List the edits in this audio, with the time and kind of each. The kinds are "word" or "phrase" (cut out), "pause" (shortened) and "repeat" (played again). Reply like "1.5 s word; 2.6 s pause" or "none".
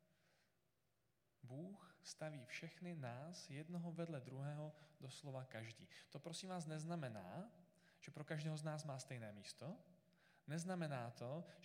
none